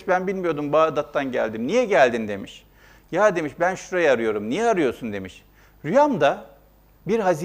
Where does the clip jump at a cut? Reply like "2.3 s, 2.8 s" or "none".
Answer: none

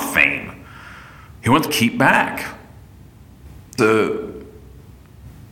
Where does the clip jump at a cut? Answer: 1.3 s, 1.7 s, 3.8 s

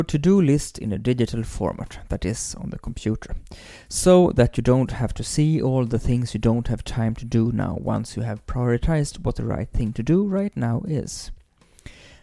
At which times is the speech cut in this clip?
none

